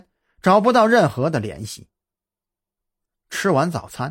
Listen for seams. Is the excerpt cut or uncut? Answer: uncut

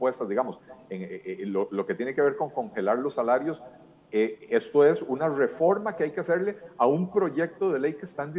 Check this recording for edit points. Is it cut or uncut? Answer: uncut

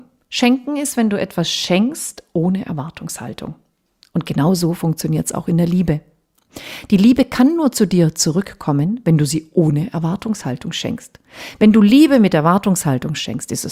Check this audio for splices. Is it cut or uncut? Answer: uncut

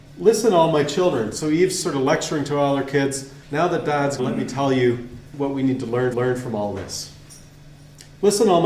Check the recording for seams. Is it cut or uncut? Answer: cut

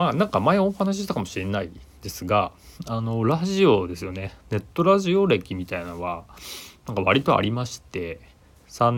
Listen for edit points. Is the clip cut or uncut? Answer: cut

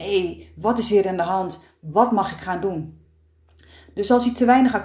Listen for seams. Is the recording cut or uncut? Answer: uncut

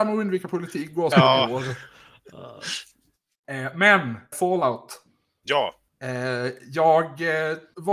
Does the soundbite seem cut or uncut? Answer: cut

